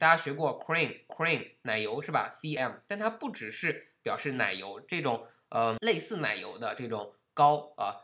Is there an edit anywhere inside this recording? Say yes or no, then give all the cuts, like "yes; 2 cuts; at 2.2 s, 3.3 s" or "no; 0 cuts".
yes; 3 cuts; at 1.1 s, 2.6 s, 5.8 s